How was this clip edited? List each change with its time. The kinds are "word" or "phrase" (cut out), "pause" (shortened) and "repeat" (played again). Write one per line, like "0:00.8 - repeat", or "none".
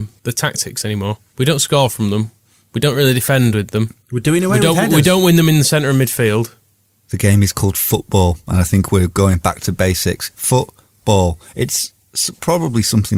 none